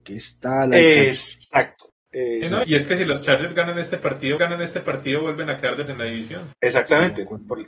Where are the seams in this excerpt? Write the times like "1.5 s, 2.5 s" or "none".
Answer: 2.6 s, 4.4 s, 5.9 s, 6.5 s